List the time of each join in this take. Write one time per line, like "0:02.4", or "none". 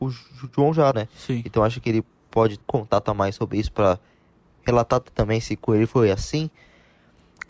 0:00.9
0:02.6